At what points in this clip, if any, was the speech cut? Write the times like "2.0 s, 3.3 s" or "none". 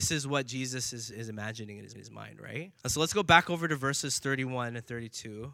1.1 s, 1.9 s, 2.8 s